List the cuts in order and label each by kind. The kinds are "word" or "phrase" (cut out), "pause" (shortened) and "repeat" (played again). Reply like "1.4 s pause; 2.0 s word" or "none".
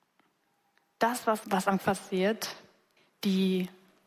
1.4 s word; 1.8 s word; 3.0 s pause